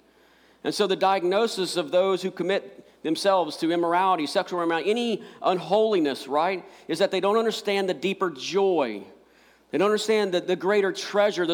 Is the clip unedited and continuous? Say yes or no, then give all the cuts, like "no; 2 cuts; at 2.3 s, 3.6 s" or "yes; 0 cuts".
yes; 0 cuts